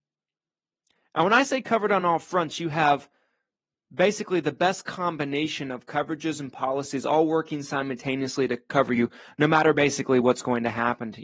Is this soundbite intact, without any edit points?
yes; 0 cuts

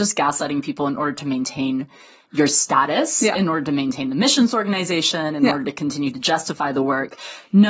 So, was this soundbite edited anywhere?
no; 0 cuts

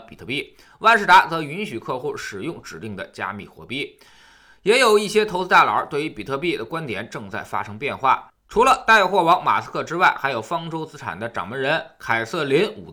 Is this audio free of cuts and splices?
yes; 0 cuts

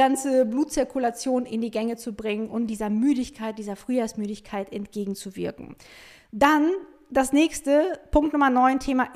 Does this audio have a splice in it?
no; 0 cuts

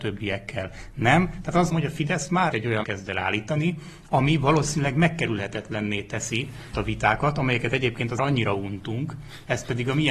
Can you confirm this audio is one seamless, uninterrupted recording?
no; 5 cuts; at 1.7 s, 2.5 s, 2.8 s, 6.7 s, 8.2 s

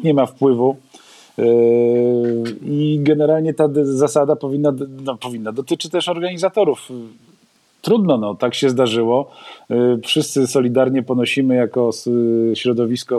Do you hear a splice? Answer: no; 0 cuts

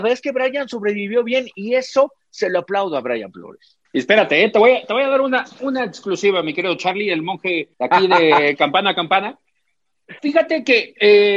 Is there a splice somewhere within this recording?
yes; 3 cuts; at 3.9 s, 7.7 s, 10.2 s

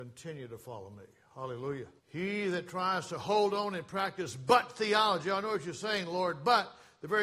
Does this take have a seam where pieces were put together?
yes; 1 cut; at 2.0 s

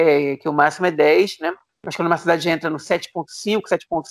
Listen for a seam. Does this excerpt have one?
no; 0 cuts

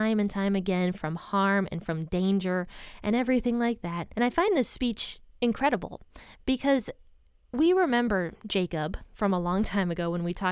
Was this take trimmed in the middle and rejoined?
no; 0 cuts

